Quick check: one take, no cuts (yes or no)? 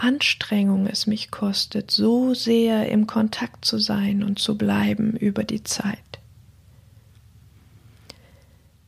yes